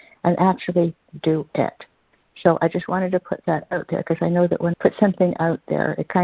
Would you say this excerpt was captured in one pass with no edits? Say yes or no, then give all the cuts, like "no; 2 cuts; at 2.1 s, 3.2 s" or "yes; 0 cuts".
no; 1 cut; at 4.7 s